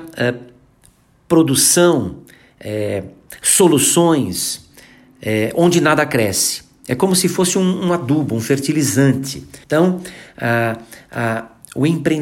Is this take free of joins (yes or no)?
no